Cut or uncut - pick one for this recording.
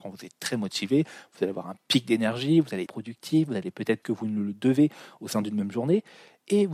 cut